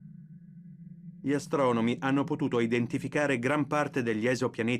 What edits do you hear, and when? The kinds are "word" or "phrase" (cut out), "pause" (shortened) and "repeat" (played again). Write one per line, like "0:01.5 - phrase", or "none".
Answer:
none